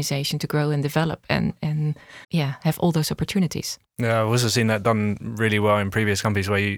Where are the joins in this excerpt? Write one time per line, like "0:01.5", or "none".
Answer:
0:02.2